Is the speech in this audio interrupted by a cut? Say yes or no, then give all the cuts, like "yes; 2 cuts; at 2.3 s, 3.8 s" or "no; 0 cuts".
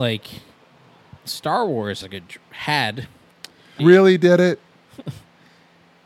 yes; 3 cuts; at 1.2 s, 2.0 s, 3.8 s